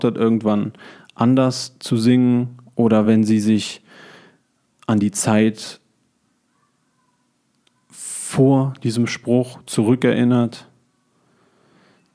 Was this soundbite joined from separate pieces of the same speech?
no; 0 cuts

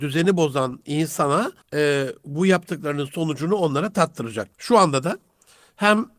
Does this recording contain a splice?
yes; 2 cuts; at 1.6 s, 4.5 s

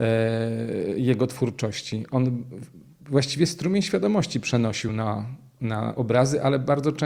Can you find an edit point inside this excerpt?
no; 0 cuts

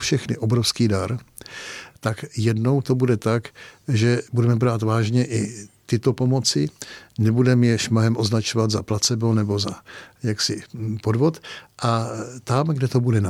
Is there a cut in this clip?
no; 0 cuts

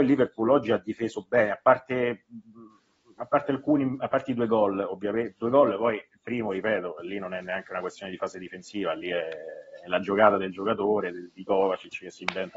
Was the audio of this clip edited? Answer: no; 0 cuts

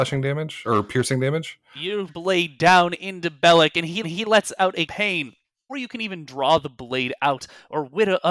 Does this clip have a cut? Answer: yes; 4 cuts; at 2.1 s, 4.0 s, 4.9 s, 5.7 s

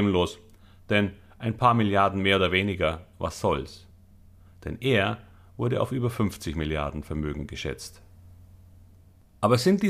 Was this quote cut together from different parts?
no; 0 cuts

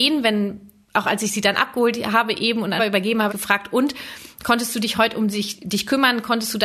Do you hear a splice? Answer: yes; 2 cuts; at 2.8 s, 3.3 s

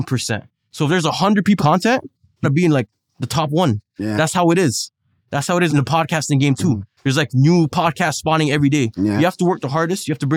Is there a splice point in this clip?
yes; 3 cuts; at 1.6 s, 2.4 s, 5.7 s

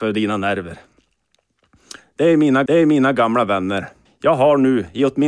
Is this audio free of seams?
no; 2 cuts; at 2.7 s, 4.1 s

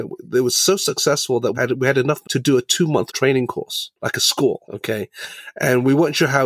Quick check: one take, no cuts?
no; 5 cuts; at 1.5 s, 2.2 s, 3.1 s, 4.0 s, 4.6 s

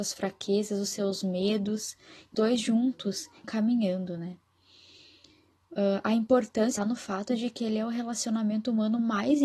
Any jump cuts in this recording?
yes; 3 cuts; at 2.3 s, 3.4 s, 6.8 s

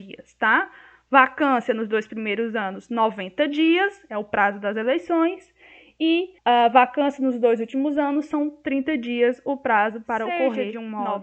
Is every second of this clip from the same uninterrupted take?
no; 1 cut; at 6.4 s

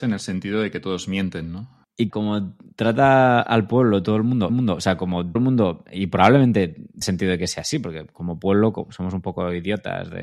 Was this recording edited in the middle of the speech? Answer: yes; 4 cuts; at 2.1 s, 4.5 s, 5.4 s, 7.0 s

